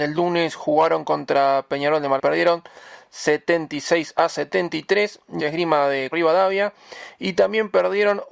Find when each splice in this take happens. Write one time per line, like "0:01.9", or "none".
0:02.2
0:05.4
0:06.1